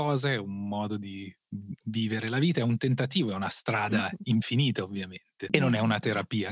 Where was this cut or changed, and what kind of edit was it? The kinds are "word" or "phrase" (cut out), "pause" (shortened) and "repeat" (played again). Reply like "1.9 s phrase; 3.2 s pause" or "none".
none